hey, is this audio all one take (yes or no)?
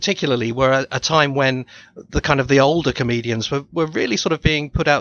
yes